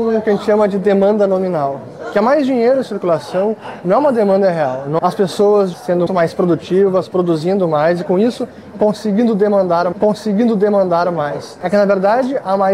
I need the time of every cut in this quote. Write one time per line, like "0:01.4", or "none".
0:05.0
0:05.7
0:06.1
0:09.9